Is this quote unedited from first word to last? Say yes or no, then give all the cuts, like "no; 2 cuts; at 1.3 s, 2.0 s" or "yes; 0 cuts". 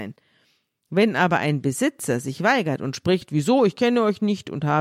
yes; 0 cuts